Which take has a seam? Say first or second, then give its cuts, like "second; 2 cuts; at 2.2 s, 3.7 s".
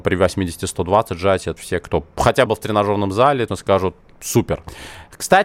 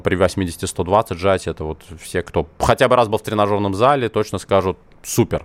first; 3 cuts; at 1.6 s, 2.5 s, 3.5 s